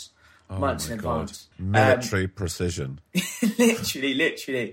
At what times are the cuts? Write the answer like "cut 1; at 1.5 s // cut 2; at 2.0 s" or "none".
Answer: cut 1; at 1.5 s